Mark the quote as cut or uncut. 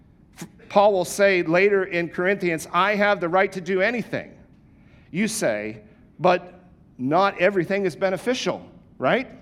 uncut